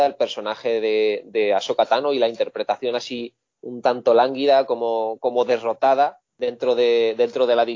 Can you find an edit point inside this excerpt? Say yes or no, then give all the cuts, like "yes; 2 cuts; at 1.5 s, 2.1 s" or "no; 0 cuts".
yes; 1 cut; at 6.3 s